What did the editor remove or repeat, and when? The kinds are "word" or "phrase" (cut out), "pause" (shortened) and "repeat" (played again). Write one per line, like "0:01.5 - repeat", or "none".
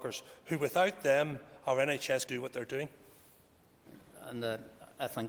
0:02.3 - word